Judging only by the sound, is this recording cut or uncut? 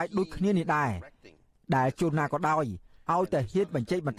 uncut